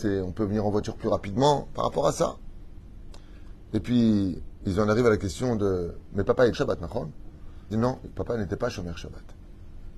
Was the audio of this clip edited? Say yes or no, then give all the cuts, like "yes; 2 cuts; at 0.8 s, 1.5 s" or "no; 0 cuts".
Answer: yes; 2 cuts; at 6.5 s, 7.7 s